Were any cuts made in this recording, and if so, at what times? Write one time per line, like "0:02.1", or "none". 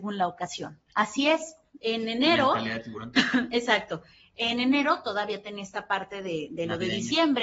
none